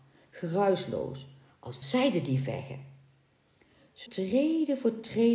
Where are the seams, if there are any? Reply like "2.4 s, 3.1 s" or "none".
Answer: 1.8 s, 4.1 s